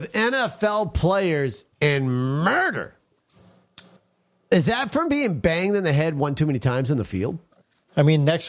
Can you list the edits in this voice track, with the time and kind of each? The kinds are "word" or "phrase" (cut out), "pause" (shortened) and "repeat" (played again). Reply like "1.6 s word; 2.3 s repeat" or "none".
1.7 s pause; 4.0 s pause